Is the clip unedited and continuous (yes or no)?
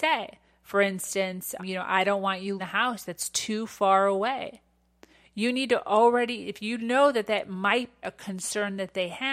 no